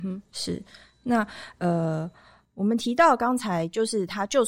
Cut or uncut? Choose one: uncut